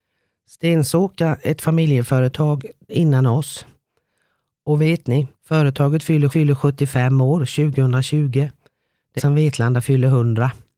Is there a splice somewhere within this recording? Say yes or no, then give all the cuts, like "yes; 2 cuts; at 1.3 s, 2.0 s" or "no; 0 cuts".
yes; 4 cuts; at 2.9 s, 5.3 s, 6.3 s, 9.2 s